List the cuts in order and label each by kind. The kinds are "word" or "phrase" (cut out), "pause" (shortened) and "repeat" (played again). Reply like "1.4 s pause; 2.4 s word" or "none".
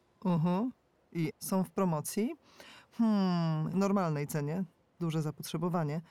1.3 s word; 3.7 s word

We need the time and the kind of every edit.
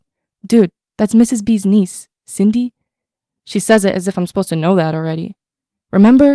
none

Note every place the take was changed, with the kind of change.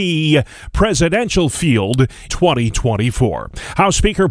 2.3 s word

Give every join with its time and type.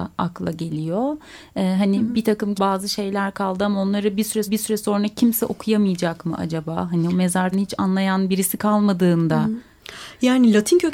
2.6 s phrase; 4.5 s repeat; 7.5 s word

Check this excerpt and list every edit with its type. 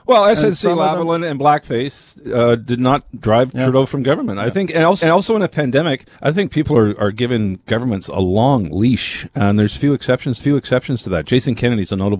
3.1 s pause; 5.0 s repeat; 6.1 s pause; 10.4 s repeat

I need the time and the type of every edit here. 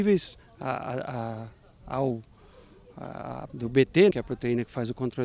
3.5 s word; 4.1 s word

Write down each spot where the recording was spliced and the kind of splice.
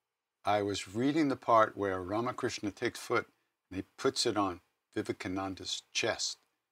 3.0 s word

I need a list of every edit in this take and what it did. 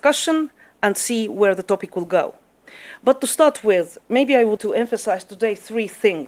4.6 s word

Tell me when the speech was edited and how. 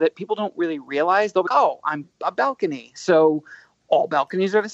1.5 s word; 2.0 s word

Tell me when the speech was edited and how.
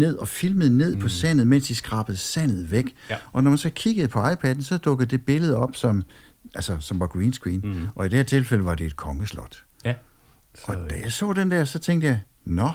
none

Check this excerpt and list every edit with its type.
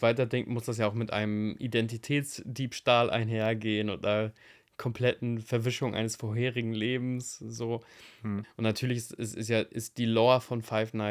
none

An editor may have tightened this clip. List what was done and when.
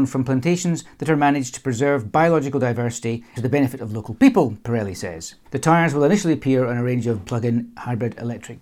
3.4 s word; 5.5 s pause; 7.2 s word

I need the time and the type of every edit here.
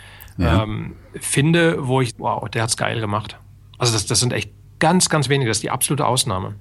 1.1 s pause; 2.1 s word

